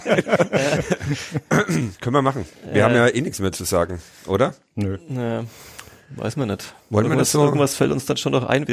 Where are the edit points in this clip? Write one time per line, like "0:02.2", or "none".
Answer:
none